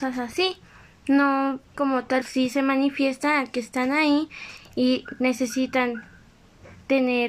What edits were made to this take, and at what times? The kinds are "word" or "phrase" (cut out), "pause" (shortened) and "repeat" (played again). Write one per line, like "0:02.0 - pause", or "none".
0:01.7 - word
0:02.2 - phrase

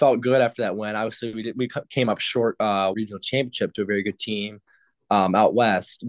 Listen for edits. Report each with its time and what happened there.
0:02.9 - phrase

